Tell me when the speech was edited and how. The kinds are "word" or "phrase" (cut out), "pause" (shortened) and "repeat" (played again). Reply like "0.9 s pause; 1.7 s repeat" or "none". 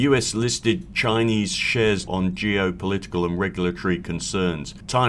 2.1 s word